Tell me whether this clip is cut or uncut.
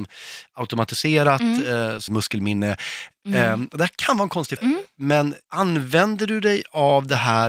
cut